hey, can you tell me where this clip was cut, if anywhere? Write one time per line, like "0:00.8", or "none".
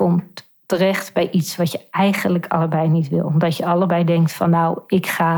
none